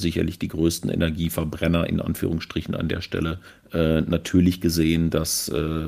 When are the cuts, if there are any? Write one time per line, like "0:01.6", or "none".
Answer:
0:03.5